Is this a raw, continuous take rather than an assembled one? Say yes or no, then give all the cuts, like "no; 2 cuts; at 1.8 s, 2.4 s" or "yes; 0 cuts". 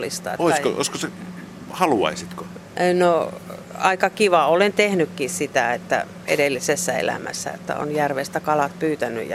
yes; 0 cuts